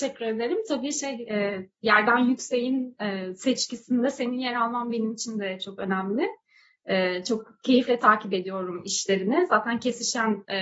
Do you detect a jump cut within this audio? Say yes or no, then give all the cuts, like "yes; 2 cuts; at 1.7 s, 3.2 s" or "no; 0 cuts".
no; 0 cuts